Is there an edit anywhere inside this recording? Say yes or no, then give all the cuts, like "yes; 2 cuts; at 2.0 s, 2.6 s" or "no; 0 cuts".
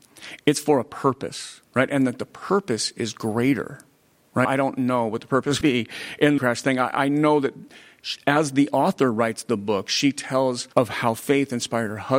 yes; 5 cuts; at 1.7 s, 4.4 s, 5.6 s, 6.4 s, 10.7 s